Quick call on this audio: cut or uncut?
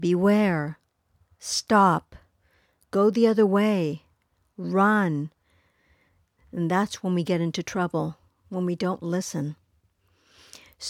uncut